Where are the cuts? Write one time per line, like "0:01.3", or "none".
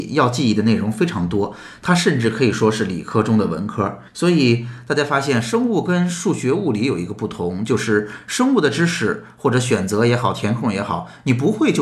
0:04.1

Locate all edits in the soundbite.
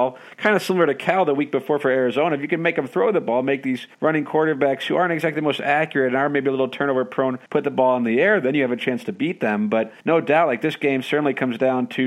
0:03.9
0:07.5
0:10.0

